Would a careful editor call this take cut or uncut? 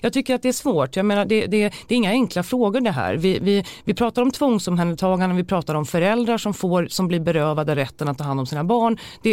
uncut